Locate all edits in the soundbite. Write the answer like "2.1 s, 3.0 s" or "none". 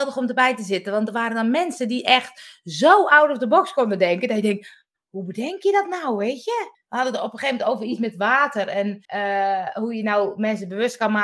6.7 s, 9.0 s